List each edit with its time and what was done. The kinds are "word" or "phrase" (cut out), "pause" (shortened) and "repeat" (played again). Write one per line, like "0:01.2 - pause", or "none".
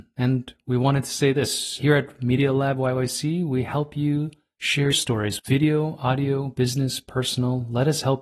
0:04.9 - word
0:05.4 - phrase